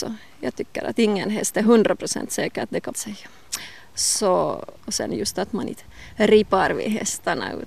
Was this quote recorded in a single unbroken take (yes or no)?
no